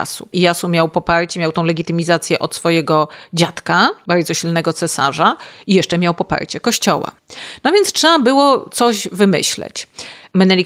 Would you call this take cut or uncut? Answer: uncut